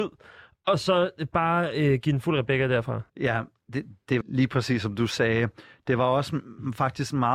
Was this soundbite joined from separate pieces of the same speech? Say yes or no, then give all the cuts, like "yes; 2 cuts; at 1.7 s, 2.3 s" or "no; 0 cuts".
yes; 2 cuts; at 3.1 s, 4.2 s